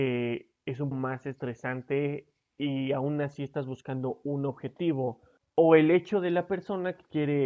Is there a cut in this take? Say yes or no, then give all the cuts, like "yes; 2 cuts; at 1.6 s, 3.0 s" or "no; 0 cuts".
yes; 2 cuts; at 0.9 s, 5.4 s